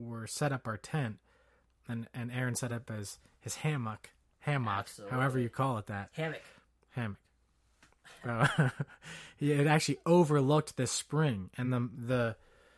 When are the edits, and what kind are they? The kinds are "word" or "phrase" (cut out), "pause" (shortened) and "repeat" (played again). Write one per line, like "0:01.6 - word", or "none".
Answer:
none